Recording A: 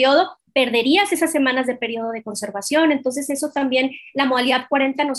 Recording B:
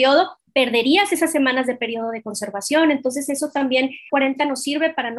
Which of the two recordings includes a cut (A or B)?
B